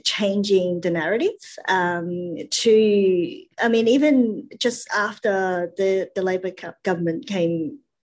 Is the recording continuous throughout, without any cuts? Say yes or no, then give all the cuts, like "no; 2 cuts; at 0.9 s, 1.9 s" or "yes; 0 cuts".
yes; 0 cuts